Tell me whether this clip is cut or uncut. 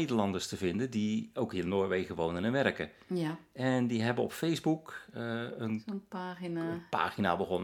uncut